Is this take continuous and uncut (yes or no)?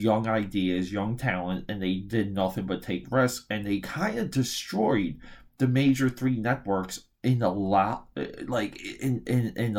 yes